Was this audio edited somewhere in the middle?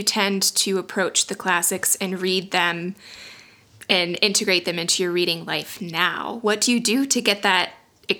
no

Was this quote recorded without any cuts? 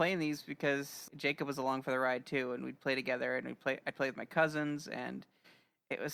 no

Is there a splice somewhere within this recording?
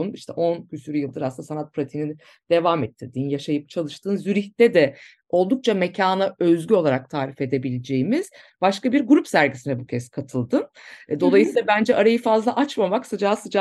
no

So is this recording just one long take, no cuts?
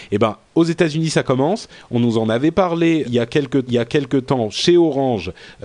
no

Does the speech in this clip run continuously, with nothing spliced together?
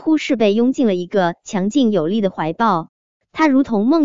yes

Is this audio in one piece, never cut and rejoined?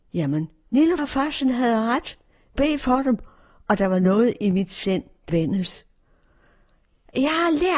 no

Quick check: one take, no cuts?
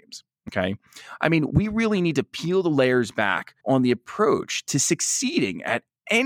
no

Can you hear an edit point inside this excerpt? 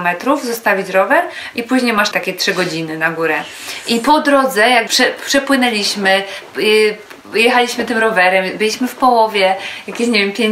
yes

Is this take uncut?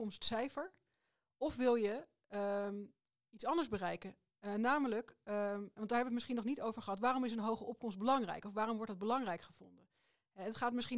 yes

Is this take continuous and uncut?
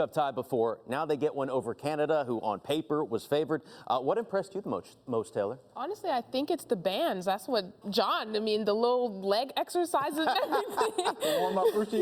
no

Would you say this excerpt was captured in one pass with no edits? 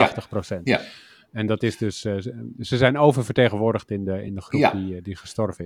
yes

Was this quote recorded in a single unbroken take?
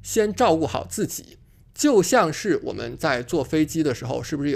yes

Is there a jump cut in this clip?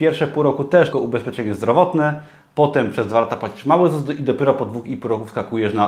yes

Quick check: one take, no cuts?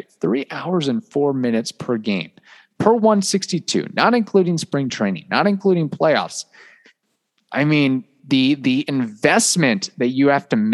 yes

